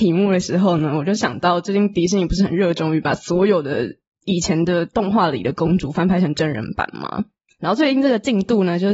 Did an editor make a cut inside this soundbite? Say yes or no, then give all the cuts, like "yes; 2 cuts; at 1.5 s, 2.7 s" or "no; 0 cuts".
no; 0 cuts